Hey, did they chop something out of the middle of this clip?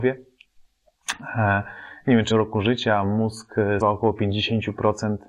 yes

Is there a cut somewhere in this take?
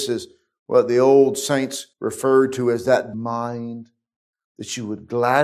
yes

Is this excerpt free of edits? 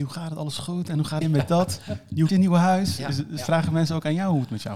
no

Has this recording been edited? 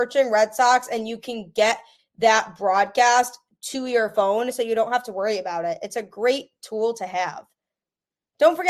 no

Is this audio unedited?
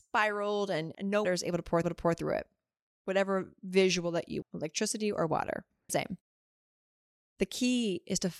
no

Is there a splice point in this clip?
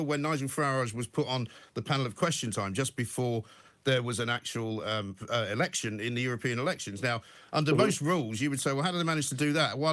no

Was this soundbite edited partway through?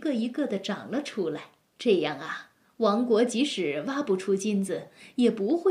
no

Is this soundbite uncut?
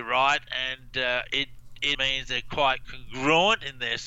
no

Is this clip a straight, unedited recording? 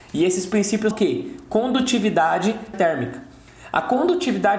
no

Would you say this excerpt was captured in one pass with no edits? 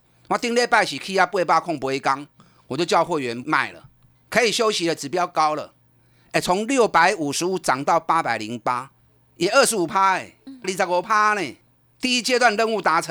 no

